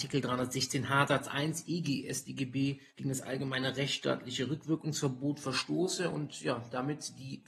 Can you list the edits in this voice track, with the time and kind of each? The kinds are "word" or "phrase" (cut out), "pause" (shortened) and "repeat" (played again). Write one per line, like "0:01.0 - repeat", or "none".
0:02.9 - pause